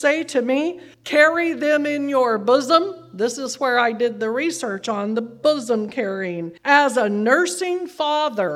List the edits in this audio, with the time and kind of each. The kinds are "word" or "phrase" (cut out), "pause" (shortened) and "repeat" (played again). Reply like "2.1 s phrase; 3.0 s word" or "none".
0.9 s pause; 6.6 s pause

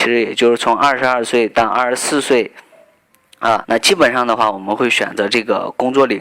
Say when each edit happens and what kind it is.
3.6 s word

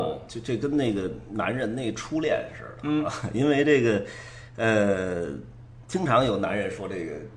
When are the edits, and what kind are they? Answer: none

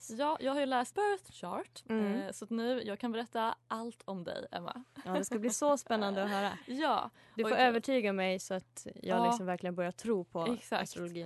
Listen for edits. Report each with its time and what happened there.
0.9 s word

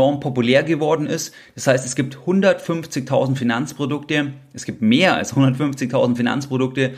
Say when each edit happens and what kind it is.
none

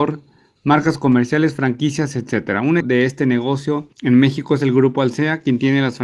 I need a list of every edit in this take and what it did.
2.8 s word; 3.9 s pause

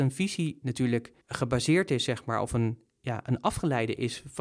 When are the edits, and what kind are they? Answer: 1.2 s pause

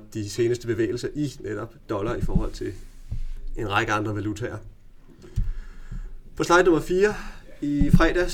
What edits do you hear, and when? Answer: none

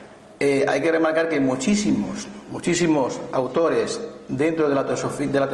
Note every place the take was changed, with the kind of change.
none

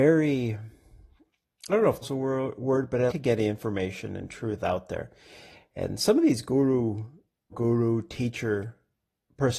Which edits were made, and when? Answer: 2.0 s word; 3.1 s word; 7.5 s word

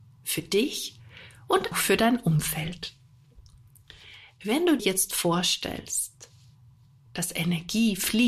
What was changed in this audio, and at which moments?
1.7 s word; 4.8 s word

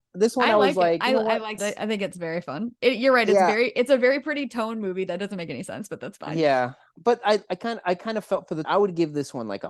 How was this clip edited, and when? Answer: 1.6 s phrase; 8.6 s word

